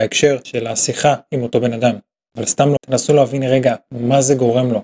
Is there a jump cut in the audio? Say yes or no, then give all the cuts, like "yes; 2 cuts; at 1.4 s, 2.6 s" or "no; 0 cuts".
yes; 1 cut; at 2.8 s